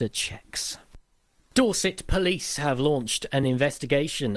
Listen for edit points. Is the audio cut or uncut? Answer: uncut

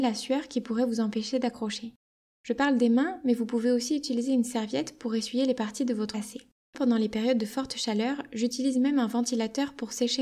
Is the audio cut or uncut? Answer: cut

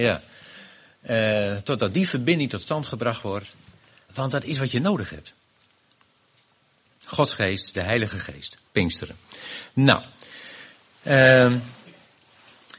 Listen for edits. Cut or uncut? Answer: cut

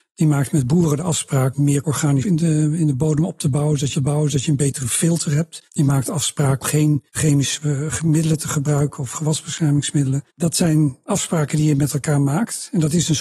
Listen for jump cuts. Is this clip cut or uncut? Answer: cut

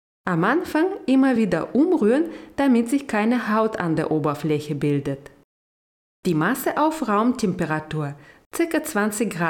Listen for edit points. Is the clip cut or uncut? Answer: uncut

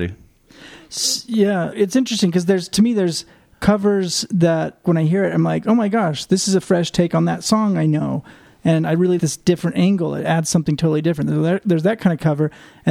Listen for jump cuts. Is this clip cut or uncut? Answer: cut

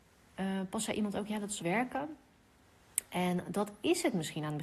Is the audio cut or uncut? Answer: cut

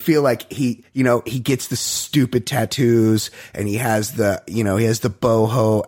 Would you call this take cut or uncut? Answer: uncut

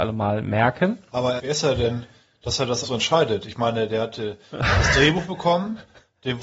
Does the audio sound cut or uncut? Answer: cut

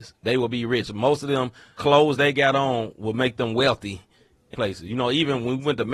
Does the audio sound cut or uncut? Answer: cut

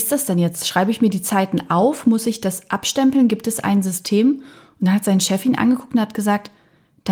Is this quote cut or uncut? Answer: uncut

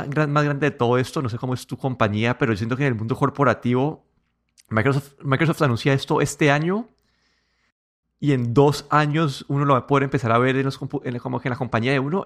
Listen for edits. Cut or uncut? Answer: uncut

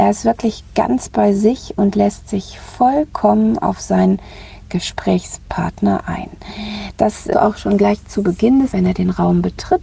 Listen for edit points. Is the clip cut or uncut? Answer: cut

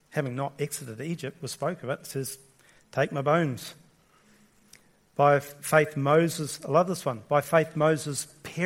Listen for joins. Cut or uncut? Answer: uncut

